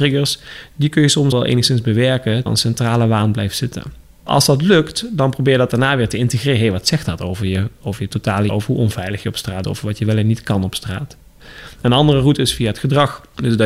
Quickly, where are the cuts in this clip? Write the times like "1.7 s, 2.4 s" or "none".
1.3 s, 2.5 s, 8.5 s, 9.6 s